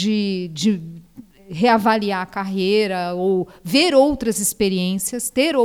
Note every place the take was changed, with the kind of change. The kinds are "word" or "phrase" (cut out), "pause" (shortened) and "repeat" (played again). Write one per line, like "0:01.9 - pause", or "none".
none